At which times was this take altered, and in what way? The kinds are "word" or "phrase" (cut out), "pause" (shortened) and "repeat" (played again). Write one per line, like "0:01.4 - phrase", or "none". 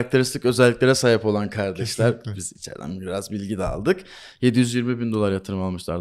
none